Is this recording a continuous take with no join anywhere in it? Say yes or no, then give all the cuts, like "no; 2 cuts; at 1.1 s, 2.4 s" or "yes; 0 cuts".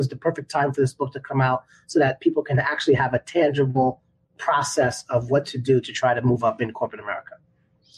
yes; 0 cuts